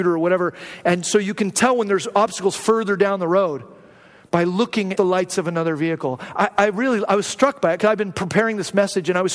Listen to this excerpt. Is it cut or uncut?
cut